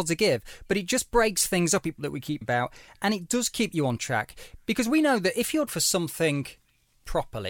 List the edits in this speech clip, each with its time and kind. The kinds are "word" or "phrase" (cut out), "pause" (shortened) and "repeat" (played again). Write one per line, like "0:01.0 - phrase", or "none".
0:02.0 - phrase
0:02.4 - word
0:05.7 - word

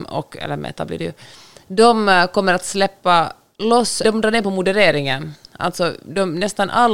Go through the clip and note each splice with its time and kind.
0:04.0 - word

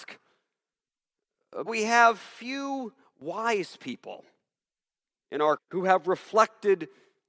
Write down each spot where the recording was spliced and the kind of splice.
0:01.7 - word
0:05.6 - word

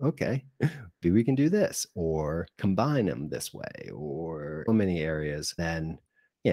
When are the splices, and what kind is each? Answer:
0:01.0 - word
0:02.5 - pause
0:04.7 - phrase
0:05.6 - word

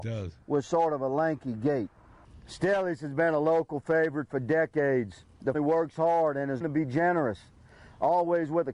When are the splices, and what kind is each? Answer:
0:05.5 - word
0:06.6 - word

